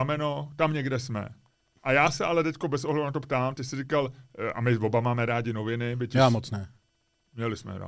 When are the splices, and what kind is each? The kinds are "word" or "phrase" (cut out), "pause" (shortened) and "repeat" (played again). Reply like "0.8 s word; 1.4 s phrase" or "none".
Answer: none